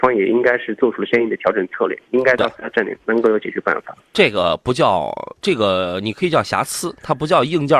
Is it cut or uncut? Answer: cut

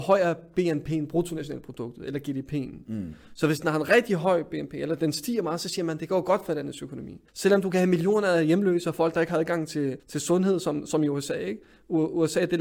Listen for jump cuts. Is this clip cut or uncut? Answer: cut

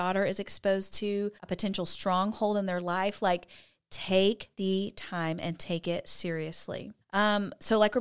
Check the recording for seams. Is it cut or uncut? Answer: cut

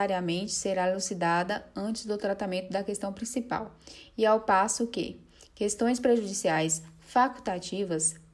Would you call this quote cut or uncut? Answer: uncut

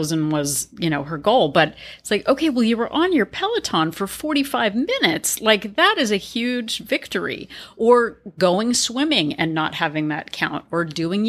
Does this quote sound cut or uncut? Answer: uncut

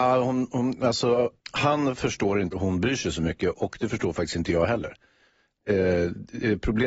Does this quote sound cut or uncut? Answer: cut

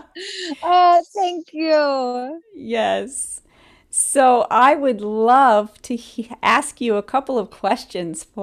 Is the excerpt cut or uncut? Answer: uncut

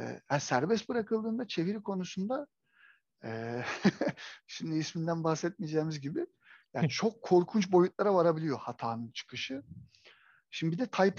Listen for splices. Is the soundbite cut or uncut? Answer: uncut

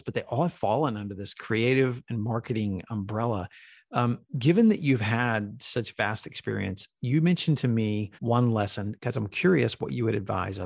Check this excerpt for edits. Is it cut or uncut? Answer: cut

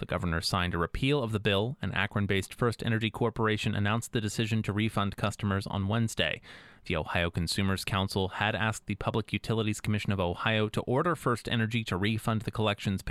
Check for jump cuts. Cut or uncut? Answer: uncut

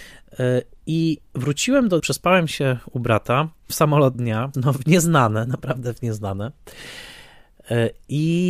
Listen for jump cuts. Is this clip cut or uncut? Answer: cut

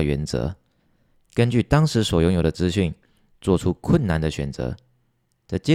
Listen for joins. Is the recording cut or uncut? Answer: uncut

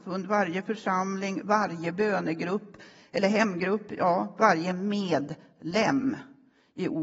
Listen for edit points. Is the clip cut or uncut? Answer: uncut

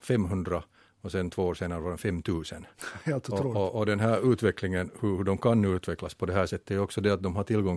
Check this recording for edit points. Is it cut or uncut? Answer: uncut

